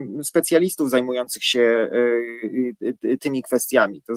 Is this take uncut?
no; 1 cut; at 3.2 s

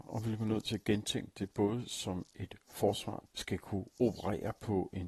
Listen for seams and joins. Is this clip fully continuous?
no; 1 cut; at 3.3 s

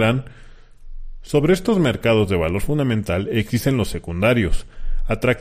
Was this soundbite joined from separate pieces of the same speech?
no; 0 cuts

